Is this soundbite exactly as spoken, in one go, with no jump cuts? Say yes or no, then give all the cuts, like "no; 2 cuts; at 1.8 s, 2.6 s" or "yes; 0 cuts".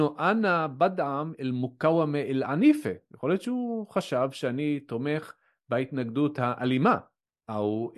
yes; 0 cuts